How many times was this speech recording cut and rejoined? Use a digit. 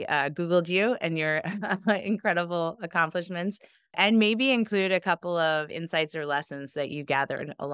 0